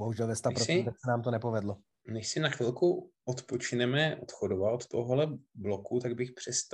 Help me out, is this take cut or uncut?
cut